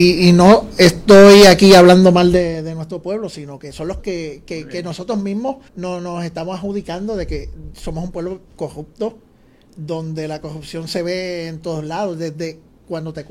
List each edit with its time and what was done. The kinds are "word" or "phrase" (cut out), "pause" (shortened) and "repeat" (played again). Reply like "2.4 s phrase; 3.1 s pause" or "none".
4.0 s word; 5.7 s pause; 8.5 s pause